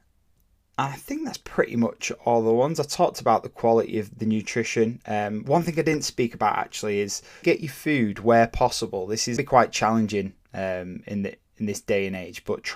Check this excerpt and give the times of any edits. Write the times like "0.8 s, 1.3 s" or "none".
7.4 s, 9.4 s

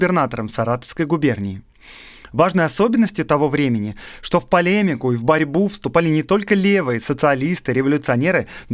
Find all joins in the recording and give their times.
none

